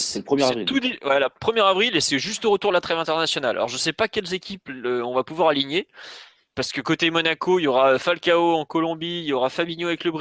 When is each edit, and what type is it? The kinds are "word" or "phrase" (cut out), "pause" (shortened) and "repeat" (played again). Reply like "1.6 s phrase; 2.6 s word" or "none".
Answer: none